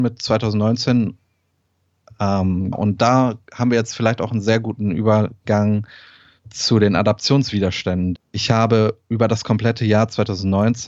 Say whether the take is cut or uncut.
cut